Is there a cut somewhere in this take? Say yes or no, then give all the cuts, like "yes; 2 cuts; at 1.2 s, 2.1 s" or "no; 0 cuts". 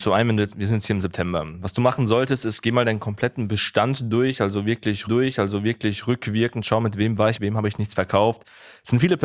yes; 2 cuts; at 5.1 s, 7.4 s